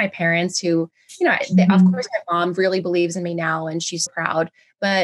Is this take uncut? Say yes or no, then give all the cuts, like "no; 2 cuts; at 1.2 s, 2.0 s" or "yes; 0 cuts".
no; 1 cut; at 4.1 s